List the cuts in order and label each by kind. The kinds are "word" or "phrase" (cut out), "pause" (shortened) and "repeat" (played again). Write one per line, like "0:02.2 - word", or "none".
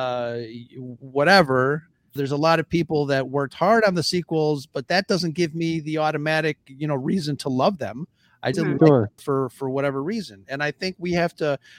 0:02.2 - word
0:08.5 - word
0:09.2 - word